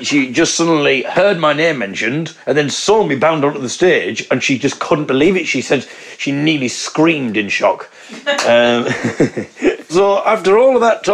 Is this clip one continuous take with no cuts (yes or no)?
no